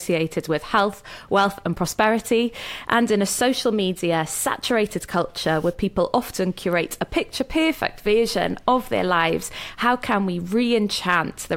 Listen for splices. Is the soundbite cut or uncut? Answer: uncut